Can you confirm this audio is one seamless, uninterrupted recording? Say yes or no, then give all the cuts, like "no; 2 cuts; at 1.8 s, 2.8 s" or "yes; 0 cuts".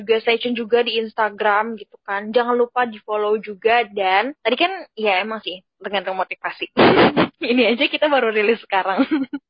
no; 1 cut; at 4.4 s